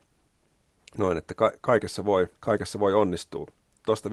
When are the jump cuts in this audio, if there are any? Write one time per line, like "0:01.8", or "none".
0:02.3